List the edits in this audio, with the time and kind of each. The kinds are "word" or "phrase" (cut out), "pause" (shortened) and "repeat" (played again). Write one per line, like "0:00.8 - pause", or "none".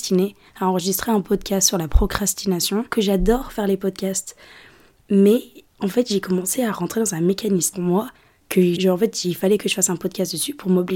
0:02.9 - word
0:07.7 - phrase
0:08.8 - word